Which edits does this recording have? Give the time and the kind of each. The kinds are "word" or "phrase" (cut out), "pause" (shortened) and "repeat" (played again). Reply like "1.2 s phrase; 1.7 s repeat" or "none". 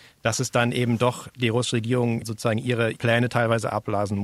none